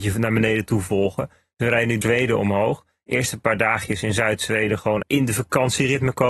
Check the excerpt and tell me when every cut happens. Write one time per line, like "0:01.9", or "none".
0:02.0
0:05.0

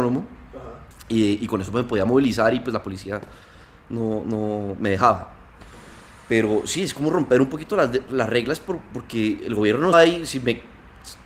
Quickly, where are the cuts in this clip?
0:09.9

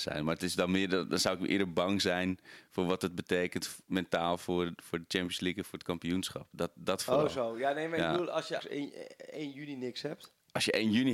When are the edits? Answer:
0:08.6

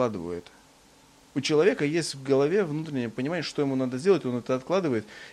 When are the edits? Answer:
none

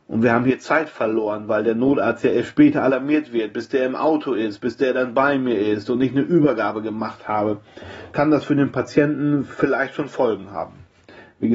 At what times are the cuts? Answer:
none

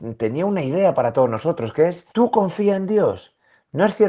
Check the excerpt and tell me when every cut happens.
0:02.1

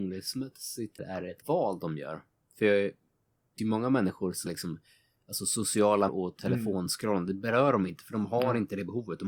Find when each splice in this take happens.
0:01.0
0:01.4
0:03.6
0:04.5
0:06.1

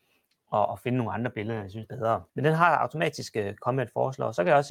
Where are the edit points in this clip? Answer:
0:01.9
0:02.3

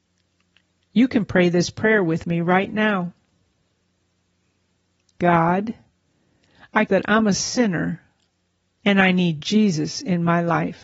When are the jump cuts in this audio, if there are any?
0:06.9

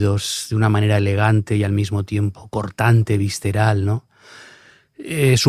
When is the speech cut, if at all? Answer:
none

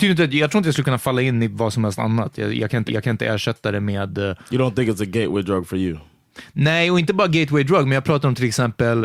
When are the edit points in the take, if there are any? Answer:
0:02.9

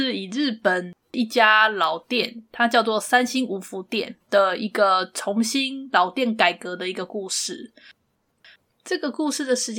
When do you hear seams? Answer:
0:04.2

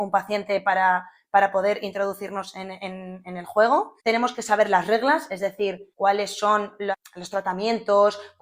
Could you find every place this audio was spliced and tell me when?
0:04.0
0:05.9

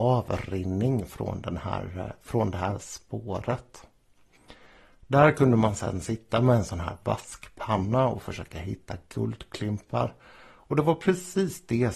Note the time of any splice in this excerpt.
none

